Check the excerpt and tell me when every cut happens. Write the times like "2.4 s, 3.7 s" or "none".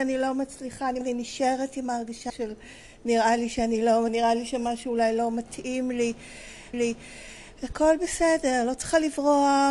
1.0 s, 2.3 s, 4.1 s, 6.7 s